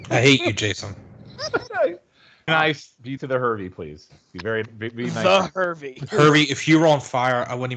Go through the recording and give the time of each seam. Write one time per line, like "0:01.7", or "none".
0:02.5
0:03.2